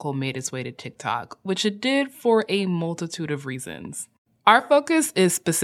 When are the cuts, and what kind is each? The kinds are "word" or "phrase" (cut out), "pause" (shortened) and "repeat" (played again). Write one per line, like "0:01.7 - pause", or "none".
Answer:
none